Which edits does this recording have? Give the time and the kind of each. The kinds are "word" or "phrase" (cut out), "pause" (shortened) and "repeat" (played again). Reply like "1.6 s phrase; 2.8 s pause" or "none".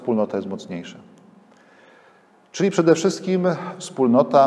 none